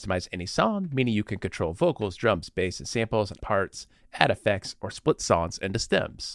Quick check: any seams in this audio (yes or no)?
yes